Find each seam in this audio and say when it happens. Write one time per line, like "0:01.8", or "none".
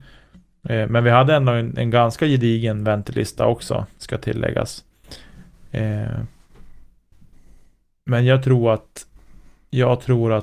none